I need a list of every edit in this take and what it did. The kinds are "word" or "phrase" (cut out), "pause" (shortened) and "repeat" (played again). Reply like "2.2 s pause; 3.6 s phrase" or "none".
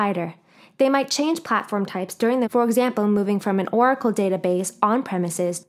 2.4 s word